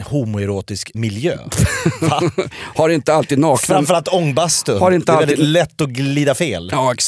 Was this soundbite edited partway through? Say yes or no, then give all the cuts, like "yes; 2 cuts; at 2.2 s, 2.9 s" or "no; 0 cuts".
yes; 1 cut; at 0.9 s